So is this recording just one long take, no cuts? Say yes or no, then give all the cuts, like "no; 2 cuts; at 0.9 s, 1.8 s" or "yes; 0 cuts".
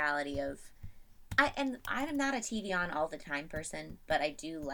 yes; 0 cuts